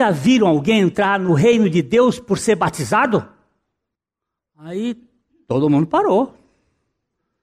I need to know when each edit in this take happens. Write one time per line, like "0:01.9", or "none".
none